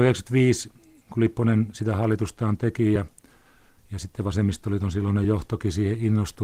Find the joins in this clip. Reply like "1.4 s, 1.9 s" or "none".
none